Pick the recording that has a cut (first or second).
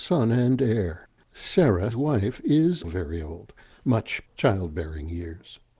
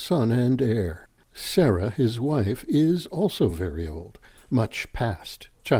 first